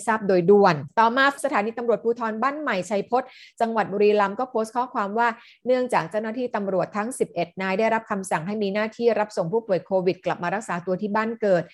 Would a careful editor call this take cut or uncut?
cut